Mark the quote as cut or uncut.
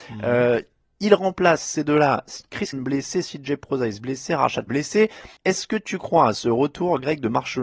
cut